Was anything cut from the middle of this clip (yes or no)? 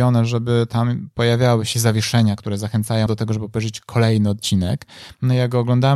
yes